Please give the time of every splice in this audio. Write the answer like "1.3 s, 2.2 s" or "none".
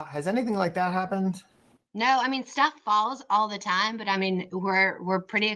none